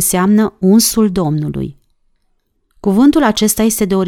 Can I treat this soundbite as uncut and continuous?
yes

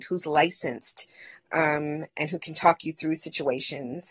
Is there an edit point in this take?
no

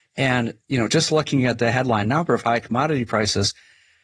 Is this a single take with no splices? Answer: yes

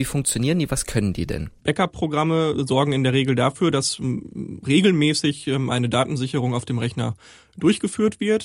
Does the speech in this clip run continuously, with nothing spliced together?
no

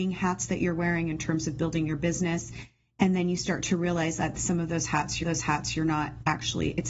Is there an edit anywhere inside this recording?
yes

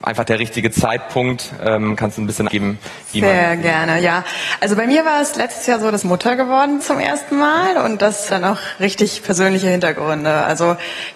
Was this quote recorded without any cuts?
no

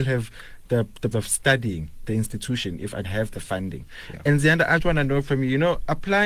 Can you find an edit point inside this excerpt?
yes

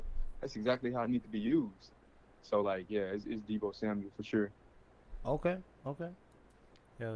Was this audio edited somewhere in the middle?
no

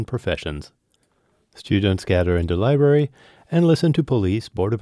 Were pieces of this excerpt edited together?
no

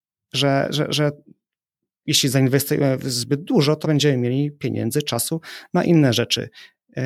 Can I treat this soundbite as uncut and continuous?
no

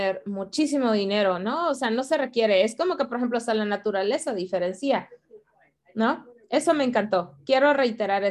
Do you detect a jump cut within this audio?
no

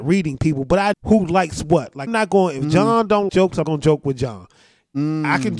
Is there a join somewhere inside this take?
yes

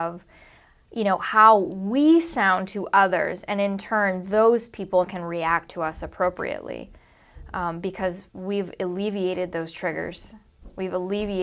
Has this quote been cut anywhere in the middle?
yes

